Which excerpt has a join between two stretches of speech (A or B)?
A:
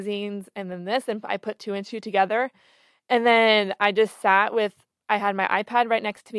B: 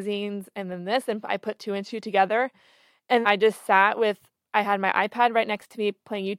B